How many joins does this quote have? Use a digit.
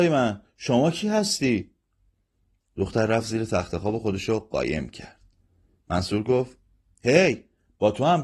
0